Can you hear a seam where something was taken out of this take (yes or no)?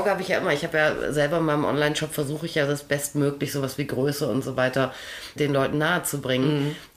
no